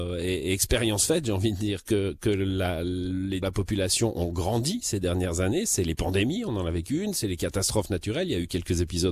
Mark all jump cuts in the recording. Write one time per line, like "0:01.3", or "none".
0:03.4